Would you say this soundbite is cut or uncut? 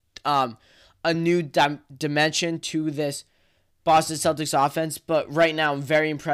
uncut